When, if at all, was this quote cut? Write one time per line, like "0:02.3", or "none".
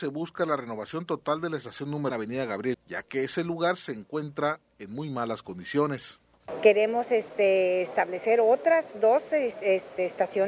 0:02.1
0:02.7